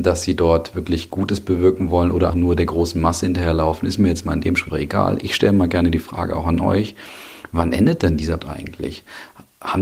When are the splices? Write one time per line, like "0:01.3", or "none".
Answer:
0:02.3
0:04.7
0:08.4